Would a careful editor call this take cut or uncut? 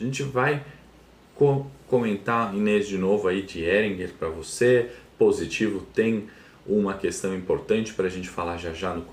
uncut